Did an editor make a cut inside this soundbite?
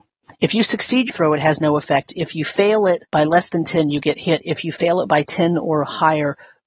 yes; 2 cuts; at 1.1 s, 3.1 s

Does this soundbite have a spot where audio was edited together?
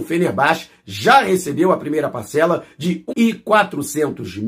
yes; 1 cut; at 3.1 s

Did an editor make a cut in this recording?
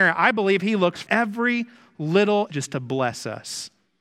yes; 2 cuts; at 1.0 s, 2.5 s

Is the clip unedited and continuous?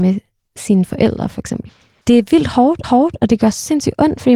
no; 2 cuts; at 1.8 s, 2.8 s

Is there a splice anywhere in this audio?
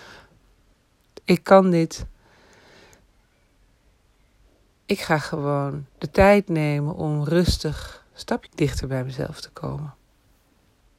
yes; 2 cuts; at 5.9 s, 8.5 s

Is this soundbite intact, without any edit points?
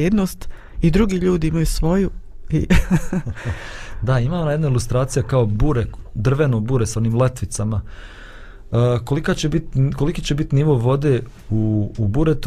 yes; 0 cuts

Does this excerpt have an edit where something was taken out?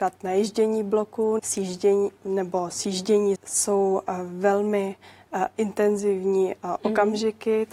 yes; 3 cuts; at 1.4 s, 2.2 s, 3.4 s

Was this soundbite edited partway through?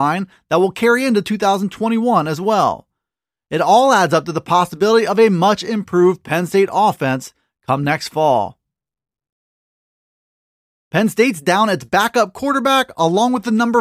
no; 0 cuts

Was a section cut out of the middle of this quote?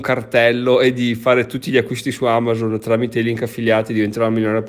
no; 0 cuts

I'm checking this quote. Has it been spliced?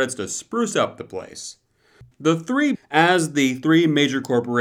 yes; 2 cuts; at 2.1 s, 2.7 s

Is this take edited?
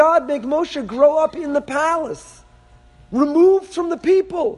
no; 0 cuts

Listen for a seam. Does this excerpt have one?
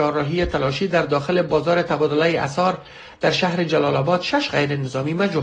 no; 0 cuts

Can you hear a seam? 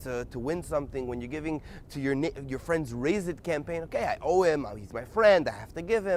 no; 0 cuts

